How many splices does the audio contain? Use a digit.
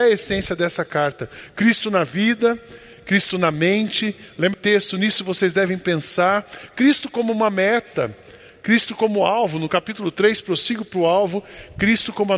1